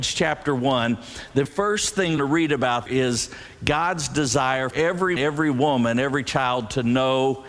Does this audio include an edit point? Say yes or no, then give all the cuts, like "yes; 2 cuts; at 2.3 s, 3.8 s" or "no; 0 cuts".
yes; 5 cuts; at 1.5 s, 2.2 s, 2.9 s, 4.7 s, 5.2 s